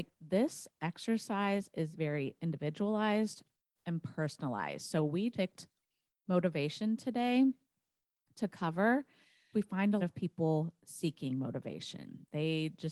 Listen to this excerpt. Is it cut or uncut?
cut